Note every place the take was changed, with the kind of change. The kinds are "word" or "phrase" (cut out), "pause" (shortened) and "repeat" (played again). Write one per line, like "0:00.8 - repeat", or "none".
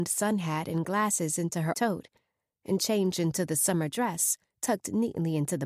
0:01.7 - word